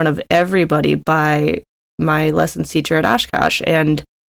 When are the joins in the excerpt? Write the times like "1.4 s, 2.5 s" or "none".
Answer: none